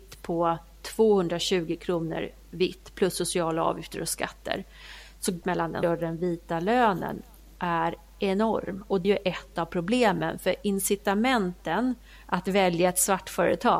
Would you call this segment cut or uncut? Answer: cut